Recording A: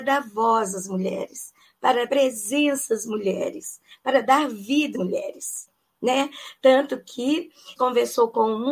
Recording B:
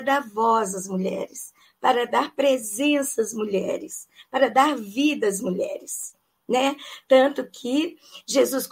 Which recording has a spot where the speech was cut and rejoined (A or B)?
A